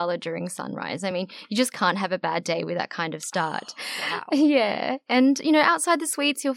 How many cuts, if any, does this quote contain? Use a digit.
0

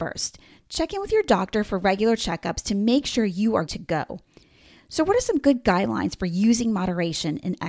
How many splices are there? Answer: 1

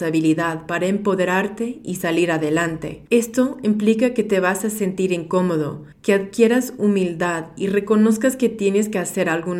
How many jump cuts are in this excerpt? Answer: 2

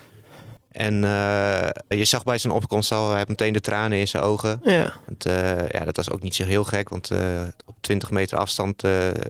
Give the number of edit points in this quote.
3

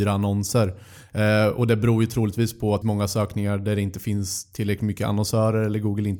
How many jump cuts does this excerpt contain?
1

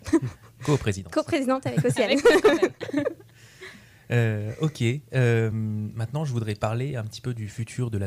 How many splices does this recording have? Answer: 0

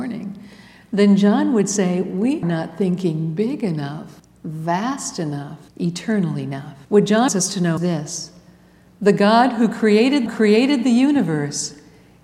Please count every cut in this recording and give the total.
7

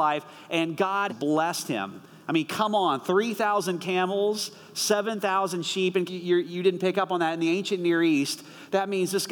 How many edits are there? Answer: 2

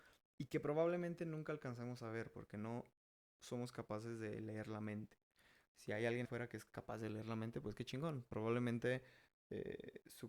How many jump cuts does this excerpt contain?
1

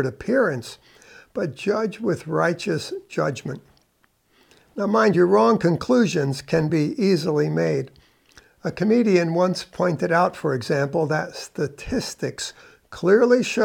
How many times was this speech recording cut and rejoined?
0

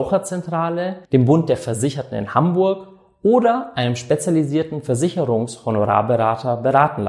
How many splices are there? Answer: 1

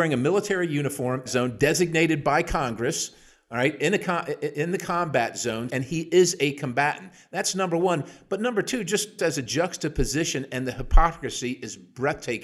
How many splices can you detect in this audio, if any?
3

